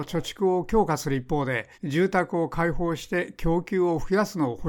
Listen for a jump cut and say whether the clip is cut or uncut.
cut